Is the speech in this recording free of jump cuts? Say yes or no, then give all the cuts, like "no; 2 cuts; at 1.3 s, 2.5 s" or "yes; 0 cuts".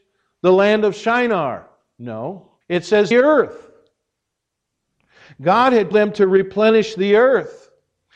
no; 3 cuts; at 2.6 s, 3.1 s, 5.9 s